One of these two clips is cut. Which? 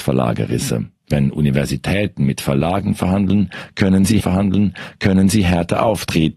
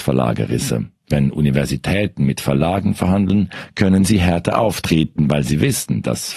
first; 1 cut; at 4.2 s

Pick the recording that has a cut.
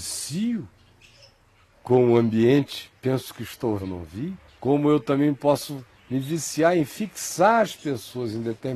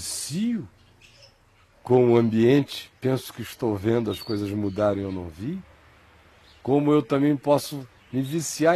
first; 2 cuts; at 3.8 s, 4.5 s

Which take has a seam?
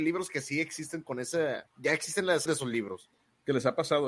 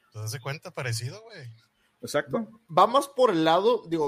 first; 2 cuts; at 1.7 s, 2.5 s

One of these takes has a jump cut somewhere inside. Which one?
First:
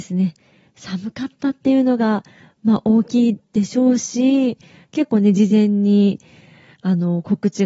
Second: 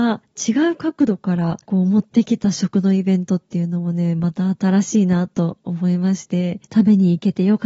second; 2 cuts; at 1.6 s, 6.6 s

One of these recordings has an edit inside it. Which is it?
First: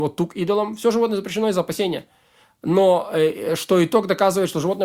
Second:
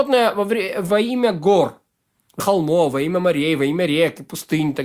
second; 1 cut; at 2.4 s

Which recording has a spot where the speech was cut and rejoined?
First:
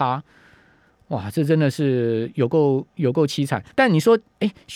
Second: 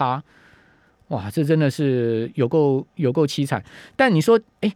first; 1 cut; at 3.7 s

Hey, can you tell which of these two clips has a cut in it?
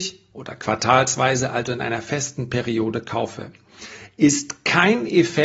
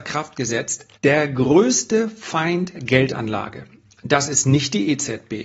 second; 2 cuts; at 1.0 s, 2.7 s

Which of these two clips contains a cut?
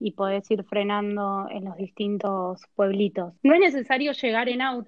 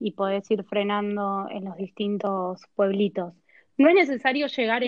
first; 1 cut; at 3.4 s

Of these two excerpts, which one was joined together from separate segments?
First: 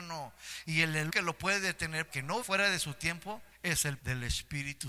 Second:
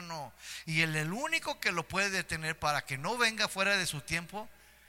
first; 5 cuts; at 1.1 s, 2.1 s, 2.4 s, 3.5 s, 4.0 s

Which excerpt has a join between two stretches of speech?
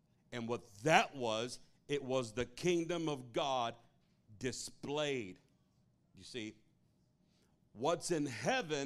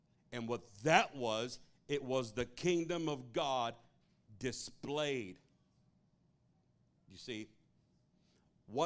first; 1 cut; at 5.8 s

